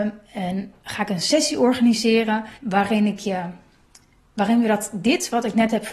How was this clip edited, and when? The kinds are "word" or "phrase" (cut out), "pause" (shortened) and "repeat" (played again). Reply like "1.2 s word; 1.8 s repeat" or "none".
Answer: 2.6 s pause